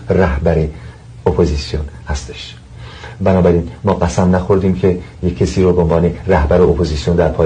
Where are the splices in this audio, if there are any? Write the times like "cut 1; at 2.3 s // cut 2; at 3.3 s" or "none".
none